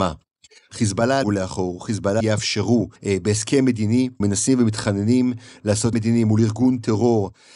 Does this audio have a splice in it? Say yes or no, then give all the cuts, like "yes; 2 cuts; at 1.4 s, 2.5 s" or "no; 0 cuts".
yes; 5 cuts; at 1.2 s, 2.2 s, 3.0 s, 4.2 s, 5.9 s